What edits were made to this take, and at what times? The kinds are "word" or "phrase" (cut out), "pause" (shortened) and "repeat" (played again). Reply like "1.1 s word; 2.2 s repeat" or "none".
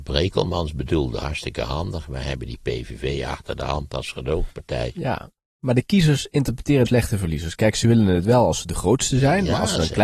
6.9 s phrase